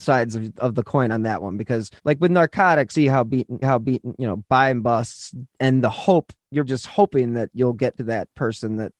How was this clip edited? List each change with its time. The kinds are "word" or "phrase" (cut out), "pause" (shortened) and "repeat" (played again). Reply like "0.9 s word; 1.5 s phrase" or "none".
2.0 s pause; 2.9 s phrase; 3.6 s repeat; 5.5 s pause; 6.7 s word; 8.0 s phrase